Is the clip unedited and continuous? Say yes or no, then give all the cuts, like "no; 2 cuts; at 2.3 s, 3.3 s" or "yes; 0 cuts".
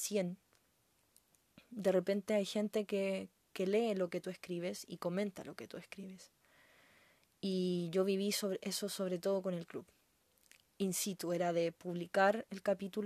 yes; 0 cuts